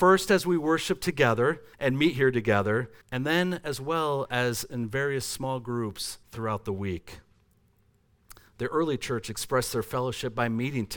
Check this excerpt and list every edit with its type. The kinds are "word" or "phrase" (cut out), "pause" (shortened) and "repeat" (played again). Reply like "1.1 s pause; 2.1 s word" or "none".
1.7 s pause; 3.0 s pause; 6.2 s pause